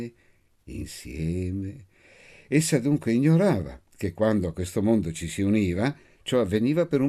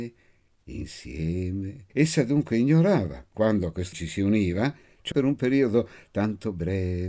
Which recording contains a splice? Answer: second; 4 cuts; at 1.9 s, 3.3 s, 3.9 s, 5.1 s

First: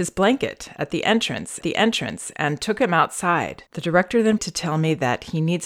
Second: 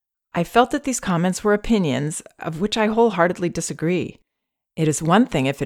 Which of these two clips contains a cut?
first; 3 cuts; at 1.6 s, 3.7 s, 4.4 s

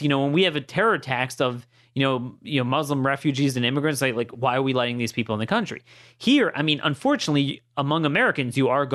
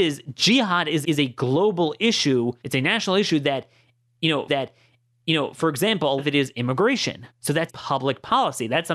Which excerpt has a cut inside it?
second; 6 cuts; at 1.0 s, 2.6 s, 4.5 s, 6.2 s, 7.3 s, 7.7 s

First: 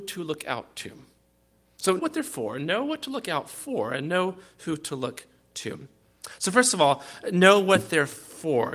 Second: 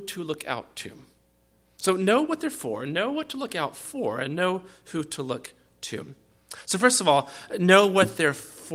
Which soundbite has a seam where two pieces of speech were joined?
first; 1 cut; at 2.0 s

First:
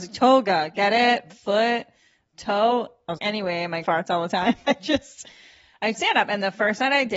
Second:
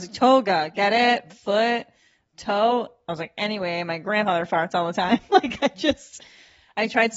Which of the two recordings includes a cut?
first; 4 cuts; at 3.2 s, 3.8 s, 4.6 s, 5.9 s

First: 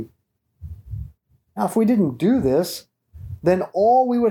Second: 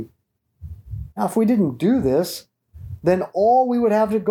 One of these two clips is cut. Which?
second; 1 cut; at 1.1 s

